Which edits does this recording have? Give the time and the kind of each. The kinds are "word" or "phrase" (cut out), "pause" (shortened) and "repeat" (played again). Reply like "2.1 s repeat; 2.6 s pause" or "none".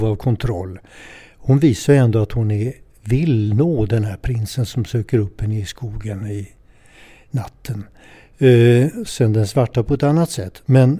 none